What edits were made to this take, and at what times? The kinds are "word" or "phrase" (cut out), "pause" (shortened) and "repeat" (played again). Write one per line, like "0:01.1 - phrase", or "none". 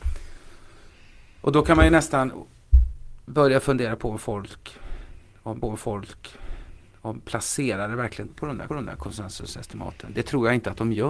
0:05.6 - repeat
0:08.3 - word
0:08.7 - repeat